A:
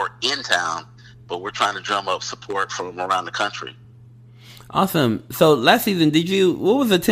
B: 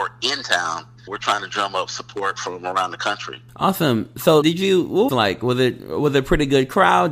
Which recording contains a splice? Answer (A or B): B